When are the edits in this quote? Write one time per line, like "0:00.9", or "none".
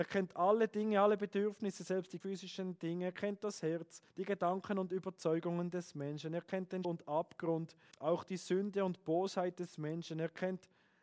0:02.2
0:04.1
0:06.8
0:07.9